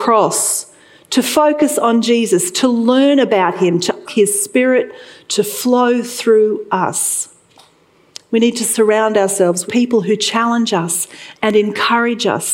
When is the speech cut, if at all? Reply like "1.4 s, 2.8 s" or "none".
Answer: 4.0 s, 9.7 s

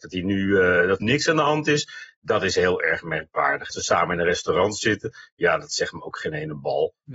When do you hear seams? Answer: 1.0 s, 3.7 s

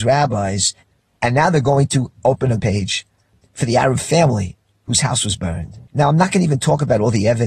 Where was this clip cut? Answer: 2.6 s, 5.9 s

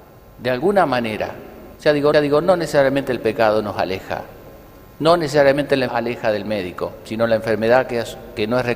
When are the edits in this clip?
1.8 s, 2.1 s, 5.9 s

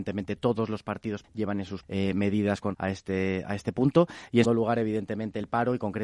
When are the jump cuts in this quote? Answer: 1.2 s, 1.8 s, 2.7 s, 3.4 s, 4.4 s

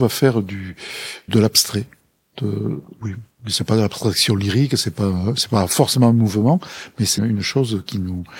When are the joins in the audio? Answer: 1.3 s, 7.2 s

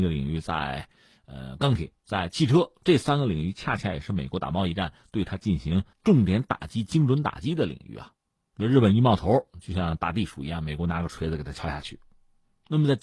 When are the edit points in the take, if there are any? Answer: 2.0 s, 5.9 s

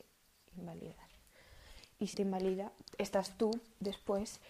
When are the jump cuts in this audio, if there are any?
2.1 s

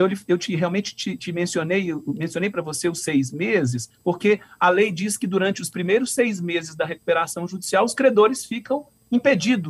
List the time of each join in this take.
3.9 s

